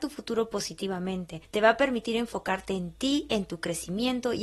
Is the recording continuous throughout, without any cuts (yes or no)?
no